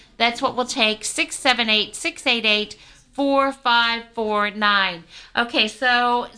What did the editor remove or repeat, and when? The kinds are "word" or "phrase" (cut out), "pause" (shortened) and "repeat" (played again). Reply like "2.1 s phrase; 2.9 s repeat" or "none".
none